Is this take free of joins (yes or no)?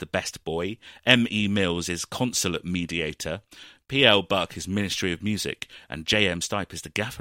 yes